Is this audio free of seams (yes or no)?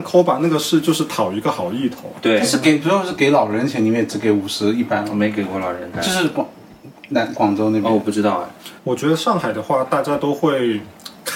no